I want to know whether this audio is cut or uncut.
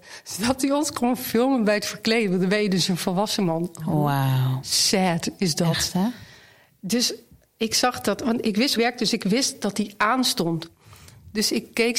cut